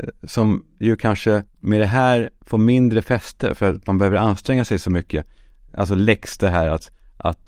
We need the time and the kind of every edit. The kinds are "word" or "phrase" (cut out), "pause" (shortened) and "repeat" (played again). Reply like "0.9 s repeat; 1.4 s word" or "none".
1.5 s pause